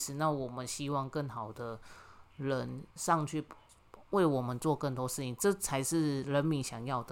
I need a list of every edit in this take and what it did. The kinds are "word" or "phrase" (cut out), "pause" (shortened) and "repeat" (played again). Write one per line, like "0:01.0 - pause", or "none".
0:02.9 - pause